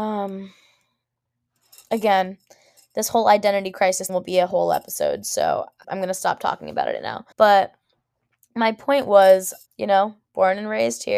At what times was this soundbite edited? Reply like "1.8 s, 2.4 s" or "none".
4.1 s, 5.8 s, 7.3 s, 9.7 s